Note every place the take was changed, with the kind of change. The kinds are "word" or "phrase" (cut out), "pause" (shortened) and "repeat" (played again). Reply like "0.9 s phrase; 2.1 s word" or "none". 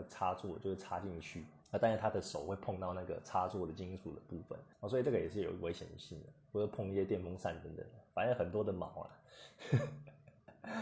1.6 s pause; 4.7 s pause